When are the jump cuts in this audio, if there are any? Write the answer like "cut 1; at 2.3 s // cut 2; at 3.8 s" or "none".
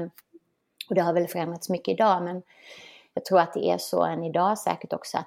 none